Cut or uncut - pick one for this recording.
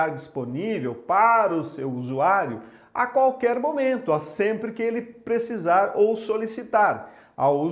uncut